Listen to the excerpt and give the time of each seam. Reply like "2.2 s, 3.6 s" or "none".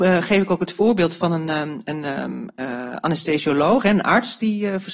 none